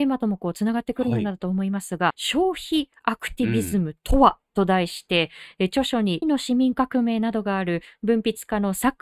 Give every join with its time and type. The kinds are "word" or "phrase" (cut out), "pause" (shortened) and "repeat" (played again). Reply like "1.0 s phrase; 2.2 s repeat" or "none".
2.1 s phrase; 6.2 s word